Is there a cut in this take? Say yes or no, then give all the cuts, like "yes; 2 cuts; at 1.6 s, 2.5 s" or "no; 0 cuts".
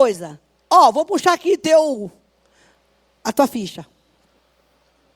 no; 0 cuts